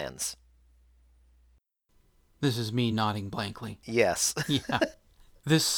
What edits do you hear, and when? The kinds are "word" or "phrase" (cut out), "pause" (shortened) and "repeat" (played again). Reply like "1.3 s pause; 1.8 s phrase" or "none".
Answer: none